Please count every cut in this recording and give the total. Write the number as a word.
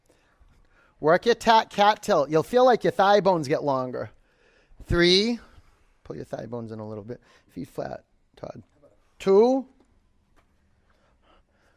zero